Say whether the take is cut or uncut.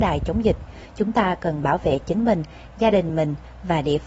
uncut